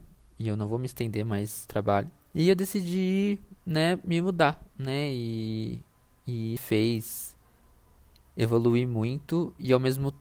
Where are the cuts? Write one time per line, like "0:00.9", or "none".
0:01.7
0:02.2
0:03.6
0:04.7
0:06.6